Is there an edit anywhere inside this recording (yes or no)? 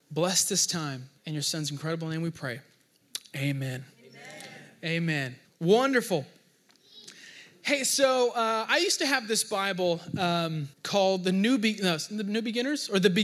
yes